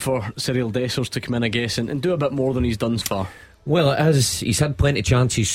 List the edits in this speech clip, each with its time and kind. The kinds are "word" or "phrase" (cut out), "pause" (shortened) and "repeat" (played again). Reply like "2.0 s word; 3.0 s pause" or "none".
3.0 s word